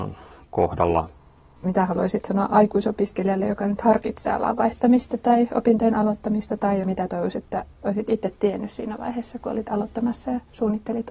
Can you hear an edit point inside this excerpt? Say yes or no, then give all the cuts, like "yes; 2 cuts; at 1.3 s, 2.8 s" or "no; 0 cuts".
no; 0 cuts